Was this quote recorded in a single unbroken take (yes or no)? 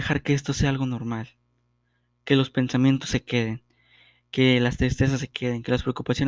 yes